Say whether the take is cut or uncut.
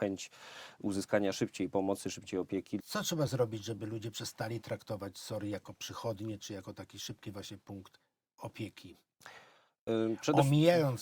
uncut